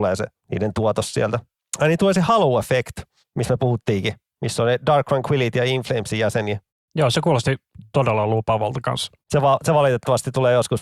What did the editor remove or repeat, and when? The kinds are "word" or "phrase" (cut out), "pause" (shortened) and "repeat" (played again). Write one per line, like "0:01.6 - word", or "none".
none